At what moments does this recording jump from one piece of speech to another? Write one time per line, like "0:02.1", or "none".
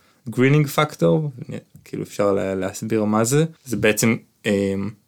0:03.6